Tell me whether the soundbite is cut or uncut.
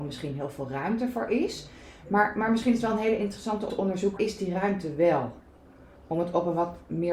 cut